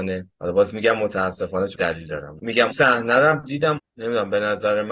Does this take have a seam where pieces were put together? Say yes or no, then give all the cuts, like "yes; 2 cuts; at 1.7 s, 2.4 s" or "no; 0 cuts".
yes; 4 cuts; at 1.7 s, 2.4 s, 2.7 s, 3.8 s